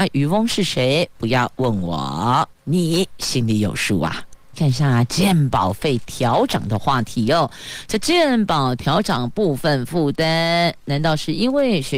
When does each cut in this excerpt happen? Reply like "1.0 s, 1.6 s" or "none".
none